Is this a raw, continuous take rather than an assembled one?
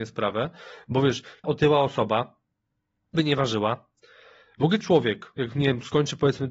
no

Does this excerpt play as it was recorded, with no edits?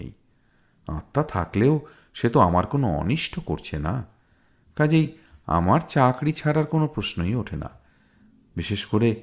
yes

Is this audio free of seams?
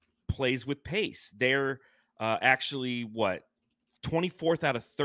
yes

